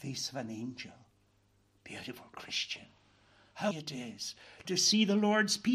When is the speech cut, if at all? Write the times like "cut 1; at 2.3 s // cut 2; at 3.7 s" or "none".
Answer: cut 1; at 3.7 s